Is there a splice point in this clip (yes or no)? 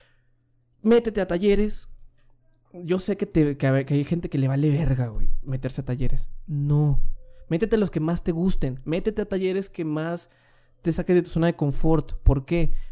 no